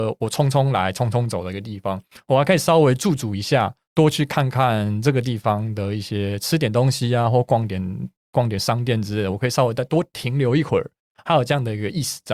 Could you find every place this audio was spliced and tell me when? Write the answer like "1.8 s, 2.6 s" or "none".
none